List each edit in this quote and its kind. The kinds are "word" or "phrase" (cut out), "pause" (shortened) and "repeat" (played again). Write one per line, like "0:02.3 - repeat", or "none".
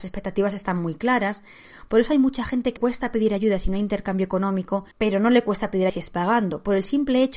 0:02.8 - word
0:04.9 - pause
0:05.9 - word